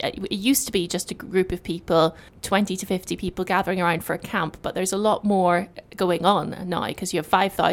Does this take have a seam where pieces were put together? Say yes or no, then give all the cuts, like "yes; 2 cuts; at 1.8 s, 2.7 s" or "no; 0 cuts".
yes; 1 cut; at 2.3 s